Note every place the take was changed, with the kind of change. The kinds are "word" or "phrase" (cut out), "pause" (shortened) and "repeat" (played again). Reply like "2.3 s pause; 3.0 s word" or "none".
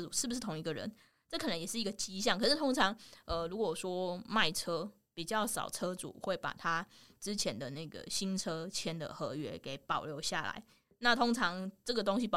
none

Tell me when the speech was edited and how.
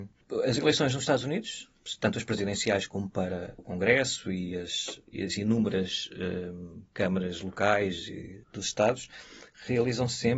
3.6 s word; 5.0 s pause; 8.4 s pause

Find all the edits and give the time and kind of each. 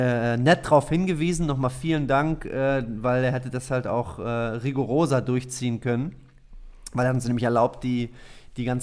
none

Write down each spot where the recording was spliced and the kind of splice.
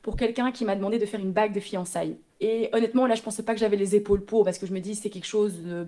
2.3 s pause

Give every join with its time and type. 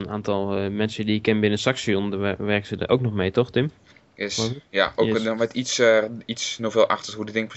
none

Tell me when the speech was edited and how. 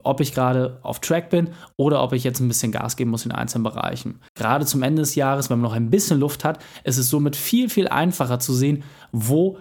4.3 s pause

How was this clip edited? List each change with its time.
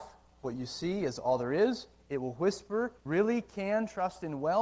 3.1 s phrase

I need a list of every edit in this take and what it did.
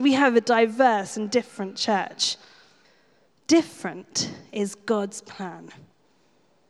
2.8 s pause

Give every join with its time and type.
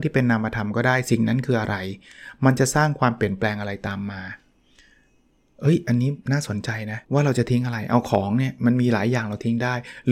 6.2 s pause; 7.0 s pause

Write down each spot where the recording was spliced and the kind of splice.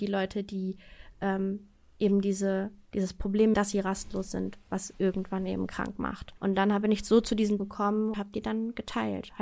3.5 s phrase; 6.4 s pause; 7.6 s word; 8.1 s word

